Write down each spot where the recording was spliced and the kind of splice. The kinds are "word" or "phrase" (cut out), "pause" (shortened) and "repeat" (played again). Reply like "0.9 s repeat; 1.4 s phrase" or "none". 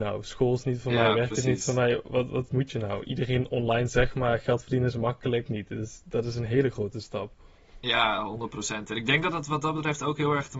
5.5 s phrase